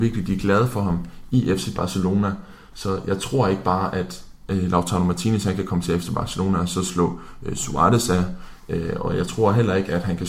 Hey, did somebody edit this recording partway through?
no; 0 cuts

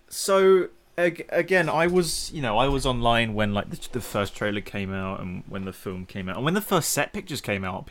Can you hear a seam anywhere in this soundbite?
no; 0 cuts

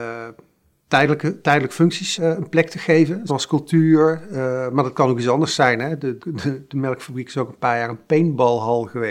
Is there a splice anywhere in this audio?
yes; 3 cuts; at 2.2 s, 3.3 s, 6.2 s

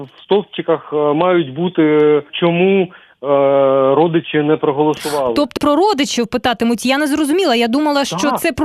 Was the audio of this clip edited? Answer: yes; 2 cuts; at 2.3 s, 5.6 s

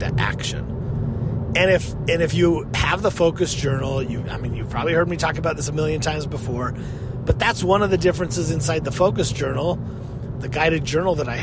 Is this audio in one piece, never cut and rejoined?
yes; 0 cuts

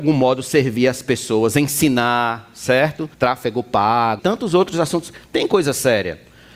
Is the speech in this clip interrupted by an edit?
yes; 2 cuts; at 3.1 s, 4.2 s

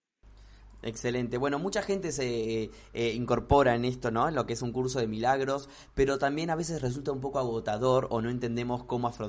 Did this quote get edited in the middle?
no; 0 cuts

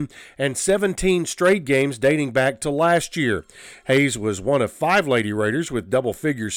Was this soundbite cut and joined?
no; 0 cuts

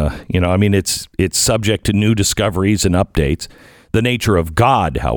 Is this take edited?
no; 0 cuts

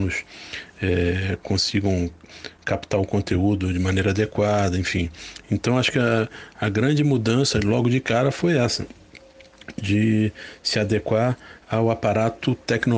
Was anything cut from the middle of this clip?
no; 0 cuts

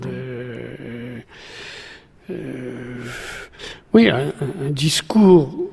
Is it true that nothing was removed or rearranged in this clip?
yes; 0 cuts

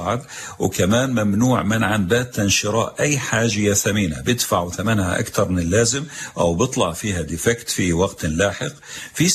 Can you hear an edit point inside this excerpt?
no; 0 cuts

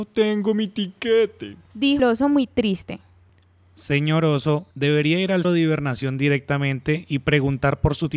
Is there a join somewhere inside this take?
yes; 3 cuts; at 2.0 s, 4.7 s, 5.4 s

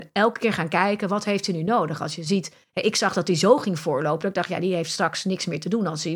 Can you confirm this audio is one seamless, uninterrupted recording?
yes; 0 cuts

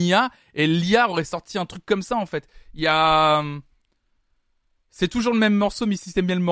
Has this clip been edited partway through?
no; 0 cuts

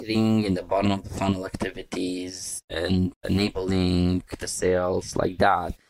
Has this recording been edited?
no; 0 cuts

